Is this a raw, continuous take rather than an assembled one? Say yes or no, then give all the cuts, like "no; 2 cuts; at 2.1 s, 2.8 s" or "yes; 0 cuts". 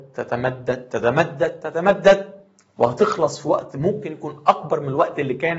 yes; 0 cuts